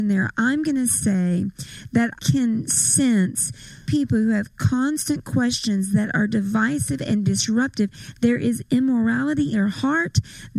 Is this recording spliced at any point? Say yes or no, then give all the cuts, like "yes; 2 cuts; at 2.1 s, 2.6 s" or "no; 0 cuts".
yes; 3 cuts; at 2.2 s, 3.9 s, 9.5 s